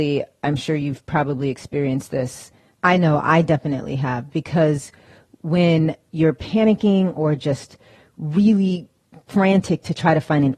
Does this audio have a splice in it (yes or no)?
no